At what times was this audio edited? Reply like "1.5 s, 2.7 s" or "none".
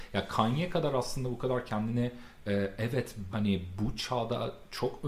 3.3 s